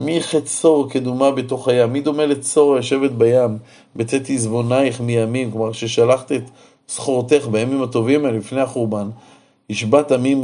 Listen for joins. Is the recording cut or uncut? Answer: uncut